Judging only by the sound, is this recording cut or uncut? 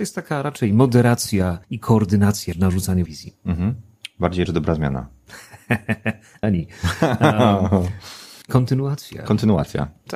cut